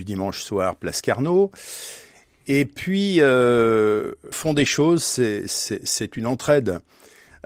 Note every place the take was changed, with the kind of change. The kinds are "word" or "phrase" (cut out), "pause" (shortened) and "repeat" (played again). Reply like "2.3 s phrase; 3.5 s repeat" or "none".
4.3 s word